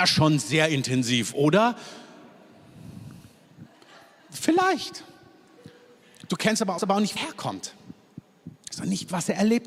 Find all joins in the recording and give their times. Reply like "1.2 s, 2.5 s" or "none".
6.8 s, 7.2 s